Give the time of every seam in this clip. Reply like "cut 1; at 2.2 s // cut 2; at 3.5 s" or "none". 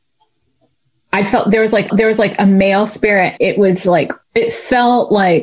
cut 1; at 1.9 s // cut 2; at 3.4 s // cut 3; at 4.2 s